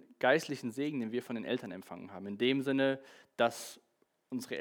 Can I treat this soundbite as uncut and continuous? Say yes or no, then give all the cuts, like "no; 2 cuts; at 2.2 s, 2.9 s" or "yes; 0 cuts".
yes; 0 cuts